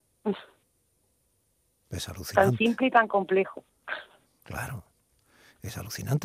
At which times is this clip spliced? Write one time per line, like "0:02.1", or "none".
0:04.3